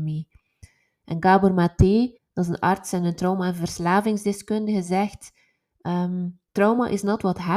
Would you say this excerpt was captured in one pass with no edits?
no; 2 cuts; at 2.2 s, 6.5 s

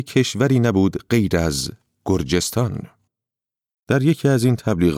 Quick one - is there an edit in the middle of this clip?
no; 0 cuts

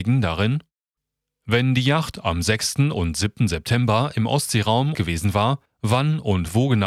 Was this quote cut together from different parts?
yes; 3 cuts; at 1.0 s, 4.9 s, 5.7 s

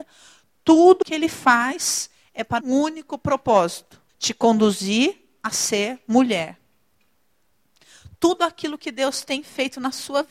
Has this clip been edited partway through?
yes; 3 cuts; at 1.0 s, 2.6 s, 4.1 s

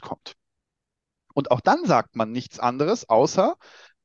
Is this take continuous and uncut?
yes; 0 cuts

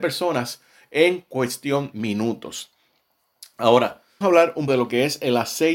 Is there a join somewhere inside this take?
yes; 3 cuts; at 1.9 s, 4.2 s, 4.7 s

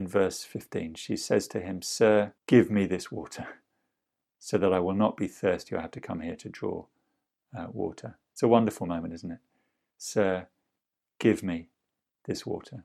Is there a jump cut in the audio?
yes; 1 cut; at 2.4 s

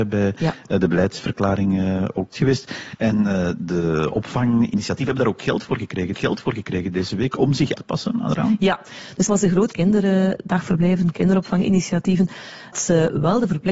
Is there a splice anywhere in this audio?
yes; 6 cuts; at 2.3 s, 6.1 s, 7.8 s, 9.3 s, 9.7 s, 12.7 s

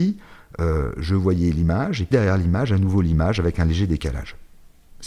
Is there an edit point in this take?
yes; 1 cut; at 2.1 s

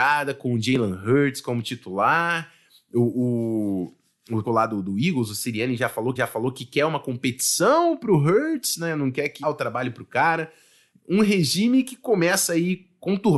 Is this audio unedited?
no; 3 cuts; at 4.4 s, 6.2 s, 9.4 s

